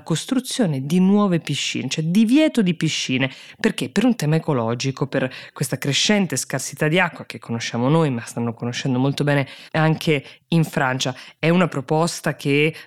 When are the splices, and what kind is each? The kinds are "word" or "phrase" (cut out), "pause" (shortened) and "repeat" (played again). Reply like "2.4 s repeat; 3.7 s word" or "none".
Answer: 9.7 s pause